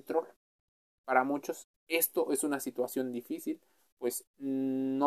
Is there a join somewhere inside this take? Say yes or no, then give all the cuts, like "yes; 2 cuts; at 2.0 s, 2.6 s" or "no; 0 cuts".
no; 0 cuts